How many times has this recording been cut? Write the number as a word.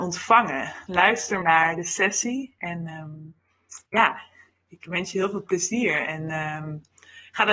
two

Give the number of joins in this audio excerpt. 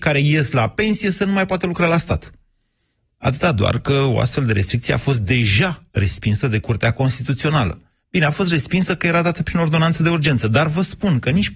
zero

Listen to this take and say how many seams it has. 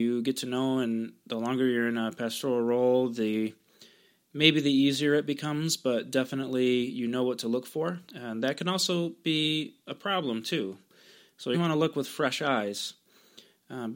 two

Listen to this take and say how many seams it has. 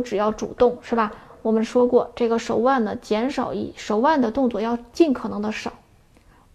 zero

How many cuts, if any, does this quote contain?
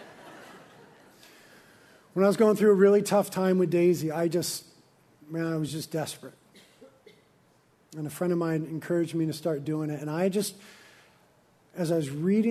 zero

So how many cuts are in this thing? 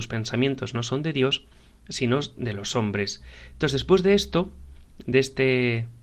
zero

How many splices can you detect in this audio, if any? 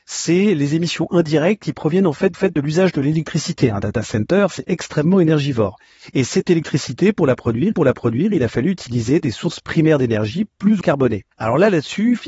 four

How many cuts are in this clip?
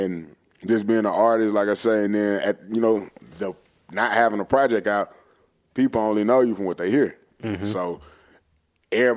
zero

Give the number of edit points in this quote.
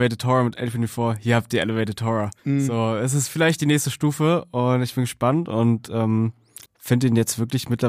two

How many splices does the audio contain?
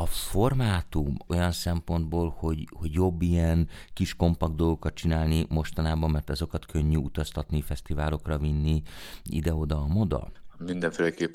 one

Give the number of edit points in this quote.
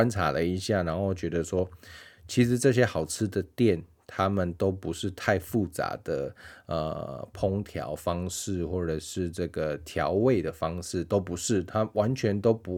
zero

